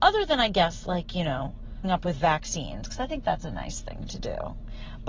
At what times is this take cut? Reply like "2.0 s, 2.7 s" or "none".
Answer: 1.8 s